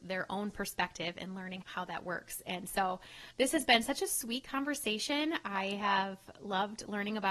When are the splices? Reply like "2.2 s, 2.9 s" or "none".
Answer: 1.6 s, 3.3 s